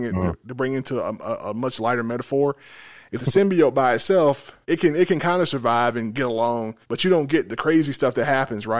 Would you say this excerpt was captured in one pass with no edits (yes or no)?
no